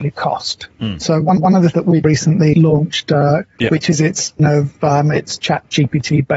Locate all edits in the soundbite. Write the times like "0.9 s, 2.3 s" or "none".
1.4 s, 1.7 s, 2.0 s, 2.5 s, 3.6 s, 4.4 s